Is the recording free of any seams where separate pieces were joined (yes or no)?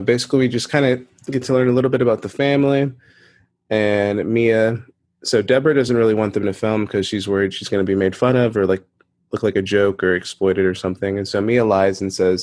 yes